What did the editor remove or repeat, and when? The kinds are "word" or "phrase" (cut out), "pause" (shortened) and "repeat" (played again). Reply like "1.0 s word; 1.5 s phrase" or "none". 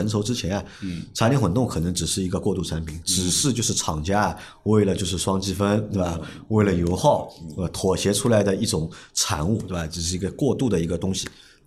none